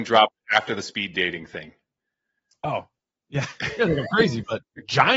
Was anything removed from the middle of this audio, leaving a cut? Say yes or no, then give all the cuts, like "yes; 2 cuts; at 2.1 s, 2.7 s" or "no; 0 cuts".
no; 0 cuts